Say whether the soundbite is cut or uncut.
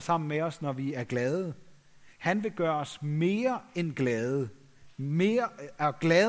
uncut